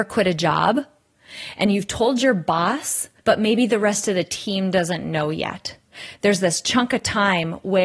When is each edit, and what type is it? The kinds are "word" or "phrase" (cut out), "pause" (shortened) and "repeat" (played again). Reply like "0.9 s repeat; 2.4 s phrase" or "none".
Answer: 3.2 s pause